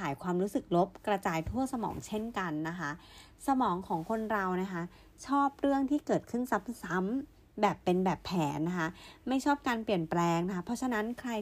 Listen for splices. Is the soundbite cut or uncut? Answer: uncut